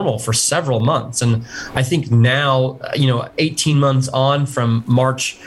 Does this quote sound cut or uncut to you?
uncut